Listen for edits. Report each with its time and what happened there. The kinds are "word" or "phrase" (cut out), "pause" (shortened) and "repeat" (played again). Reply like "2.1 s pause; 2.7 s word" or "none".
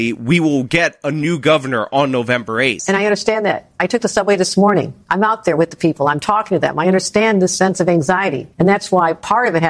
5.0 s pause; 8.5 s pause